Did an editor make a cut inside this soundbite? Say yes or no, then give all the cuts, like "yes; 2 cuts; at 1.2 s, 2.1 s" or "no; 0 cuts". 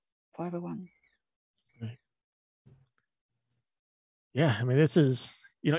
no; 0 cuts